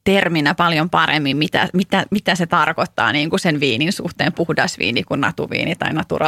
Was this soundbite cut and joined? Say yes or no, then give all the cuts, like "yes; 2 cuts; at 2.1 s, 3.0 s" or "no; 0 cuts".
no; 0 cuts